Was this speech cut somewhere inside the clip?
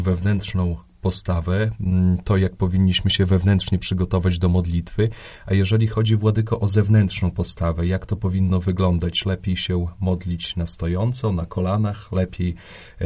no; 0 cuts

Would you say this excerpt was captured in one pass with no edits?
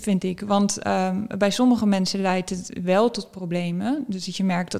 yes; 0 cuts

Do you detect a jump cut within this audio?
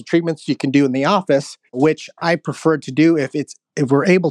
yes; 1 cut; at 1.7 s

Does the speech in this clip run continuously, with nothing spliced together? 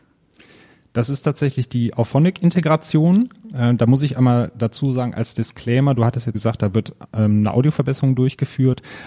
no; 1 cut; at 6.3 s

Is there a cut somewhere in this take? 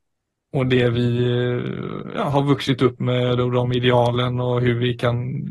no; 0 cuts

